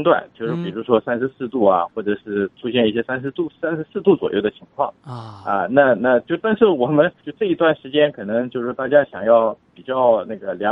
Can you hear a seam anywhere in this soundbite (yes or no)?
yes